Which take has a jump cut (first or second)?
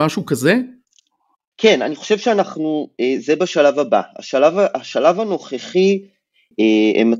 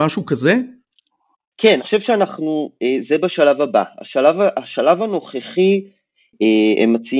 second